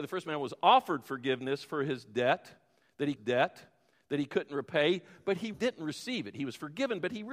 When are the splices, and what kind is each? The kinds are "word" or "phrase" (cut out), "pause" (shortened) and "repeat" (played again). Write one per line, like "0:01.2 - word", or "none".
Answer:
0:03.2 - repeat
0:05.5 - word